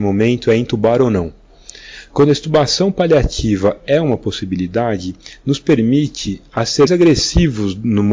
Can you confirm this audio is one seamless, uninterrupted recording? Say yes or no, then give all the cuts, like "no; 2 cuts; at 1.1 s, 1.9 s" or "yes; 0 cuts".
no; 1 cut; at 6.9 s